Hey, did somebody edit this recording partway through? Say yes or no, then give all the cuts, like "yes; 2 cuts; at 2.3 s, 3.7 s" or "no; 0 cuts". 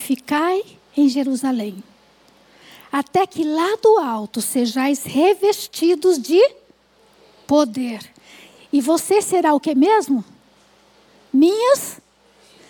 no; 0 cuts